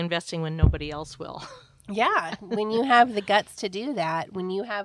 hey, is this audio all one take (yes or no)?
yes